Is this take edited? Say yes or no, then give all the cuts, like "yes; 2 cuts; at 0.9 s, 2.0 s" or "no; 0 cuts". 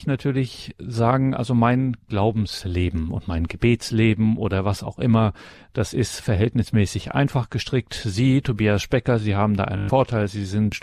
no; 0 cuts